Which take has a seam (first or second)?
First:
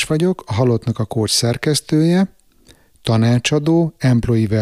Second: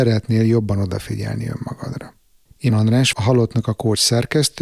second